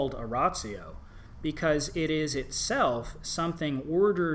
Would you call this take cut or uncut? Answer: uncut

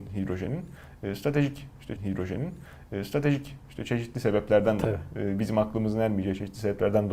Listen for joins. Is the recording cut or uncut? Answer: cut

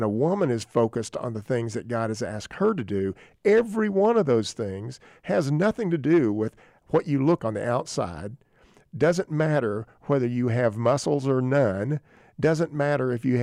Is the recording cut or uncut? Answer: cut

